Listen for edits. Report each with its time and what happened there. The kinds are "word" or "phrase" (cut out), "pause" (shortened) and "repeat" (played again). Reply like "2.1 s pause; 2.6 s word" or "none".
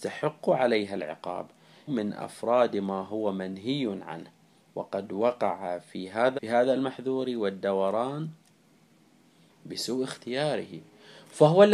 1.9 s word; 6.4 s word